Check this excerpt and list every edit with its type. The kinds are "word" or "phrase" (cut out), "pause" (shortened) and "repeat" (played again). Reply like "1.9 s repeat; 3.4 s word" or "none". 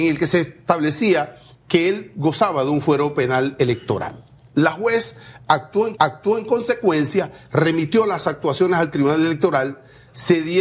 5.9 s repeat